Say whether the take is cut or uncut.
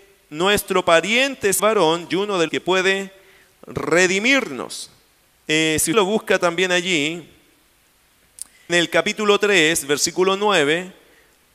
cut